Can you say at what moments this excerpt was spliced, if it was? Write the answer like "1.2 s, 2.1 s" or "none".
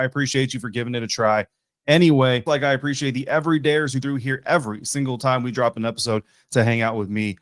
2.5 s, 4.0 s